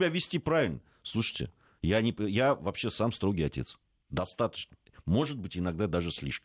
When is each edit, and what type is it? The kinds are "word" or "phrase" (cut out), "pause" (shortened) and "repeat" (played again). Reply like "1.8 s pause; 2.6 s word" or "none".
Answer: none